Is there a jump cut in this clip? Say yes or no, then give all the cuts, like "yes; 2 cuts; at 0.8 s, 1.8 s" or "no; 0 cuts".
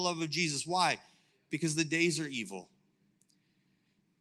no; 0 cuts